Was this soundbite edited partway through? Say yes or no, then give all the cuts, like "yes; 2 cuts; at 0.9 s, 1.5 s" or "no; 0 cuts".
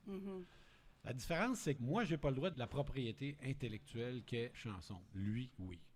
yes; 3 cuts; at 1.8 s, 2.5 s, 4.5 s